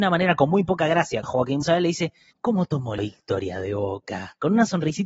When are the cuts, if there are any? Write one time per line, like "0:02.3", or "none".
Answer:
0:01.2
0:01.6
0:02.3
0:03.0